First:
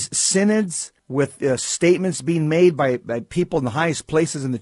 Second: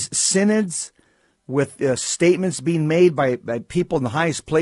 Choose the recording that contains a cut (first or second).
first